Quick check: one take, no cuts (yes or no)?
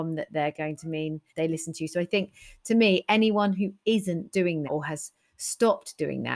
no